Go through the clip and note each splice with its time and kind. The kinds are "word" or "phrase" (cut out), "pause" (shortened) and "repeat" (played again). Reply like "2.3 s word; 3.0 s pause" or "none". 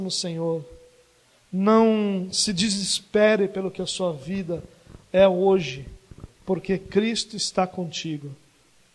none